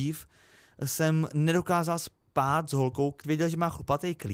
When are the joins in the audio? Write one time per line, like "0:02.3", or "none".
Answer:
0:03.2